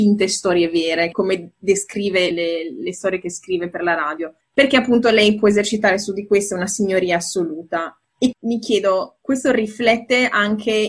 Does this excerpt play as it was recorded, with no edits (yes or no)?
no